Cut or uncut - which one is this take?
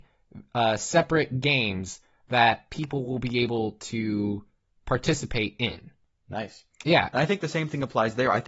uncut